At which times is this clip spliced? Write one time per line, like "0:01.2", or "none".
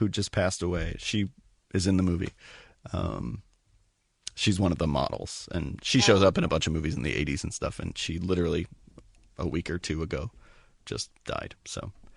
none